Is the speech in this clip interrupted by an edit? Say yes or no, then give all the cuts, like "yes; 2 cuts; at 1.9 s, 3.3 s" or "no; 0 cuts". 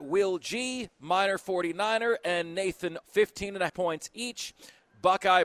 yes; 2 cuts; at 3.0 s, 3.7 s